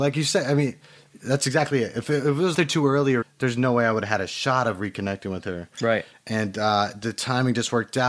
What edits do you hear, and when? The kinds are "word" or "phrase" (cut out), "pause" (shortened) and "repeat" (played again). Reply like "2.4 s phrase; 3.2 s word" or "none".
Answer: 2.5 s phrase; 3.2 s word